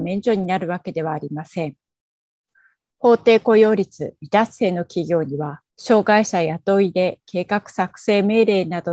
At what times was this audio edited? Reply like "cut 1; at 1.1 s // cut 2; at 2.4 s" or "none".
cut 1; at 5.7 s